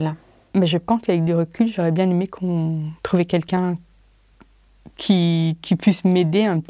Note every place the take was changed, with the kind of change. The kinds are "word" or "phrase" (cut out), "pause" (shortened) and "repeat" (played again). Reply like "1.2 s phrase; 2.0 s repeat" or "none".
3.0 s pause